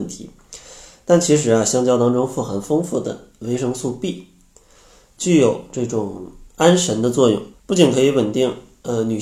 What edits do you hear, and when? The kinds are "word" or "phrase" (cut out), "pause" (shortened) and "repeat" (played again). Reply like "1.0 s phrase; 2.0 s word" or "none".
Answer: 6.5 s pause; 7.5 s pause